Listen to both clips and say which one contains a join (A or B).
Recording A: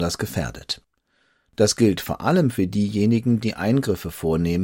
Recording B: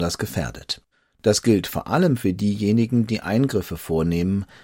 B